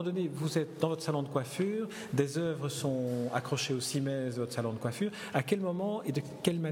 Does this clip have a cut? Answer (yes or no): no